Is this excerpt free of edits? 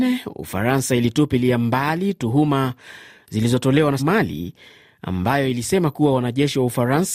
no; 1 cut; at 4.0 s

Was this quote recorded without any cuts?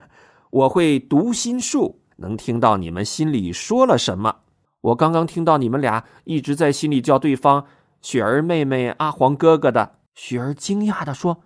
no; 3 cuts; at 2.1 s, 4.7 s, 10.1 s

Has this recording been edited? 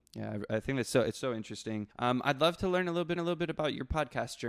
yes; 2 cuts; at 1.9 s, 3.2 s

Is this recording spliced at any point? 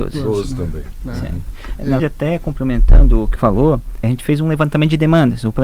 yes; 3 cuts; at 2.0 s, 3.4 s, 4.0 s

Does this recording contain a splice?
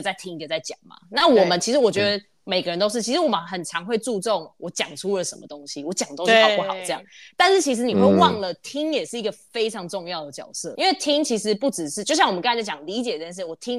yes; 1 cut; at 10.8 s

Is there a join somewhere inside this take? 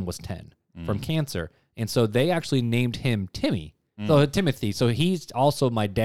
no; 0 cuts

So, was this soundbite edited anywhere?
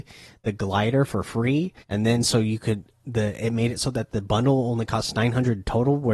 yes; 1 cut; at 1.8 s

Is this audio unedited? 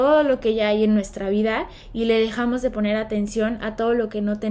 yes; 0 cuts

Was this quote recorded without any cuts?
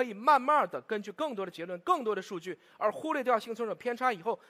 yes; 0 cuts

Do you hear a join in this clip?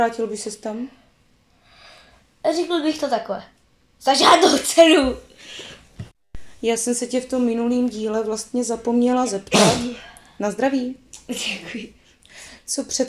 no; 0 cuts

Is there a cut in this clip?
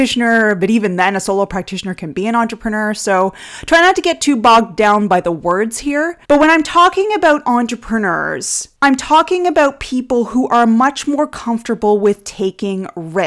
yes; 2 cuts; at 6.2 s, 8.7 s

